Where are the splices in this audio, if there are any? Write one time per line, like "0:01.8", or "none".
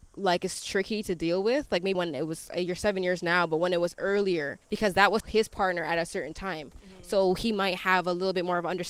0:01.9
0:04.6
0:05.2